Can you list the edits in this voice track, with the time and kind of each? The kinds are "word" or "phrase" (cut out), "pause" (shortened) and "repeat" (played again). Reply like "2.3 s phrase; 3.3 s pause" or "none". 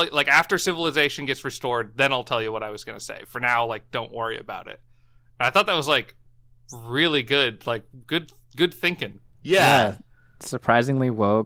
none